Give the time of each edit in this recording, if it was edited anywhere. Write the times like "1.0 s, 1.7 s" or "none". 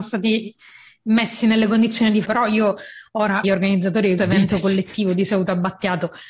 2.2 s, 3.4 s, 4.2 s